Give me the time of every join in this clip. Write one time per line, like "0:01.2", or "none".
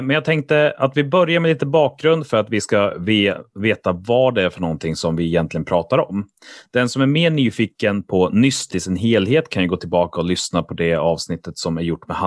0:08.7